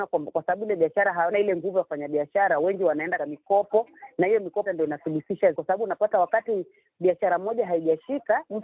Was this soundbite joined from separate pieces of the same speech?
yes; 4 cuts; at 1.3 s, 3.2 s, 4.7 s, 5.5 s

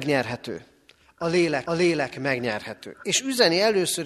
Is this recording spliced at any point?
yes; 1 cut; at 1.7 s

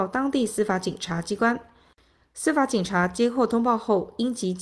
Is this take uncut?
yes; 0 cuts

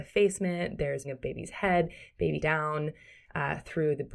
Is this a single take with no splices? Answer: no; 2 cuts; at 1.0 s, 2.4 s

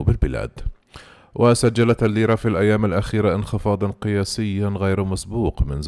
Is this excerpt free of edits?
yes; 0 cuts

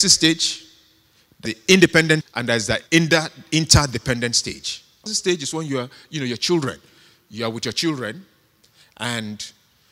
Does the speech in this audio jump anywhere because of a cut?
yes; 4 cuts; at 1.5 s, 2.2 s, 2.9 s, 5.1 s

